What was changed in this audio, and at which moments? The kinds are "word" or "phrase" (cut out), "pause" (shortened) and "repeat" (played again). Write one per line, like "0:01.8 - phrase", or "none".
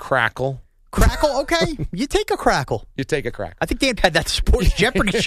0:04.0 - word